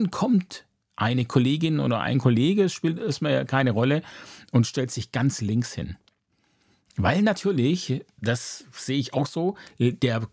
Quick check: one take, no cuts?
yes; 0 cuts

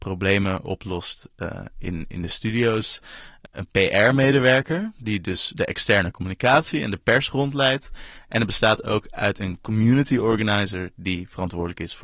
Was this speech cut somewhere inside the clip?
no; 0 cuts

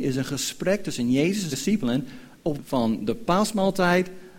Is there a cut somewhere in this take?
yes; 2 cuts; at 1.5 s, 2.6 s

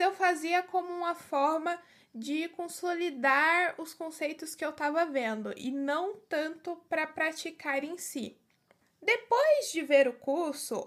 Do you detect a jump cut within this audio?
no; 0 cuts

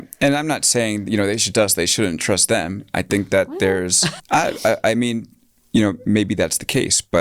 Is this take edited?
yes; 2 cuts; at 1.5 s, 4.2 s

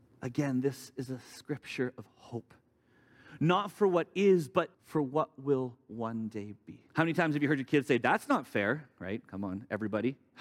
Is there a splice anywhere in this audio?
yes; 2 cuts; at 4.7 s, 6.9 s

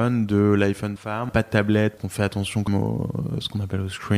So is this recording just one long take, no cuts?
no; 4 cuts; at 1.0 s, 1.3 s, 2.0 s, 2.7 s

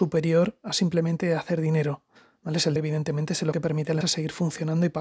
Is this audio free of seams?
no; 4 cuts; at 2.2 s, 2.8 s, 3.5 s, 4.0 s

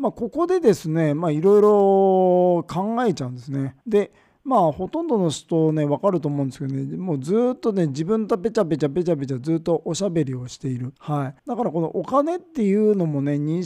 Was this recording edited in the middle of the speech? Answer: yes; 3 cuts; at 3.8 s, 11.0 s, 11.4 s

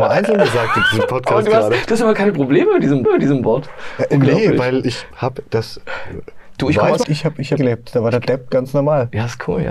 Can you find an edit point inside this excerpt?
yes; 4 cuts; at 3.1 s, 4.8 s, 7.0 s, 7.6 s

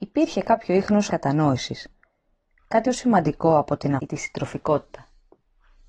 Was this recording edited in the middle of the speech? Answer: yes; 3 cuts; at 1.1 s, 2.8 s, 4.0 s

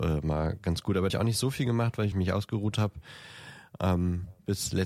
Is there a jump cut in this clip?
yes; 2 cuts; at 1.1 s, 2.1 s

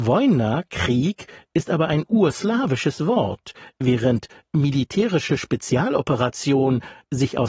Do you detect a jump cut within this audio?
no; 0 cuts

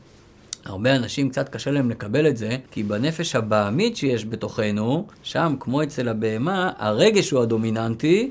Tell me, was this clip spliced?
yes; 2 cuts; at 2.7 s, 5.1 s

